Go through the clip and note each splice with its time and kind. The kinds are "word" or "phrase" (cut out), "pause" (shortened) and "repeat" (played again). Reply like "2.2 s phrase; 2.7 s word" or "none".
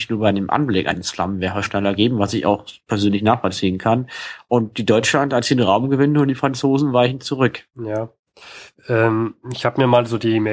7.7 s pause; 9.4 s pause